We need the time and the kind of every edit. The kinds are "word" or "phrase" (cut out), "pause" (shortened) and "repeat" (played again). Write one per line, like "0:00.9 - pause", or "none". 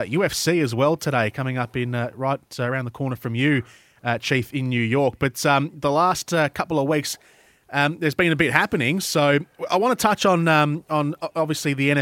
none